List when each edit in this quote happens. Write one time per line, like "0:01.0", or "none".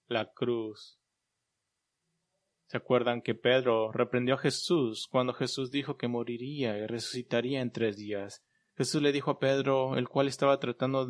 none